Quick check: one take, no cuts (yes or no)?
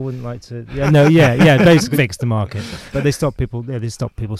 no